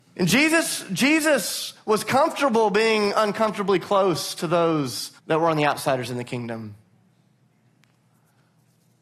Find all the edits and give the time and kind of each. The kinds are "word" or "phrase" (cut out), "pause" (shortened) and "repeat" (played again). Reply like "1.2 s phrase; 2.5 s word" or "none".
5.2 s pause